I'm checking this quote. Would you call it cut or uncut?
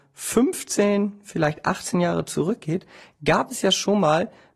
uncut